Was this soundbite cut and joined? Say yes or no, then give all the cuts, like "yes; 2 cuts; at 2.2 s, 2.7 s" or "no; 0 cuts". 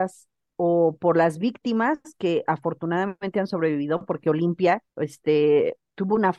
yes; 1 cut; at 4.9 s